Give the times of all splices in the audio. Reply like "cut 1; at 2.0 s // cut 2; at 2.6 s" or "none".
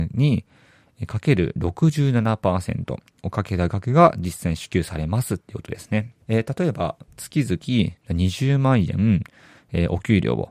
cut 1; at 3.1 s // cut 2; at 6.2 s